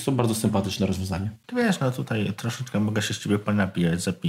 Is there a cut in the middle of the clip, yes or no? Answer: no